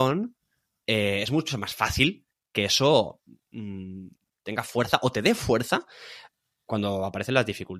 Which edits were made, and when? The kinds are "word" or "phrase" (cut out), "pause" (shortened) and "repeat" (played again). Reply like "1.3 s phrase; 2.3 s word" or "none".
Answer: none